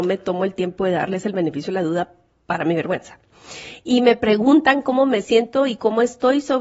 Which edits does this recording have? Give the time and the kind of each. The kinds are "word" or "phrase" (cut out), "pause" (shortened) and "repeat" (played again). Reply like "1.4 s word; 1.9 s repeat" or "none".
none